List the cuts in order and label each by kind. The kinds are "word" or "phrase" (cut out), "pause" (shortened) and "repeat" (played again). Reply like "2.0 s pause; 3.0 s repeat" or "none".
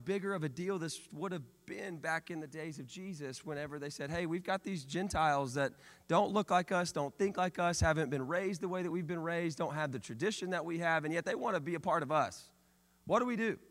none